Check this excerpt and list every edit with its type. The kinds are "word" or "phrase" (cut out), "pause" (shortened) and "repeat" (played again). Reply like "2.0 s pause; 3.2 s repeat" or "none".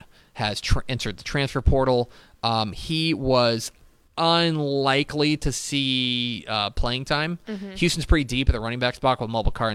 none